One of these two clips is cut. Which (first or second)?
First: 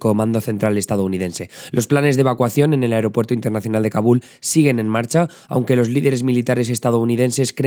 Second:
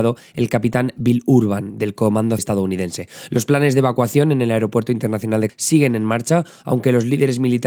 second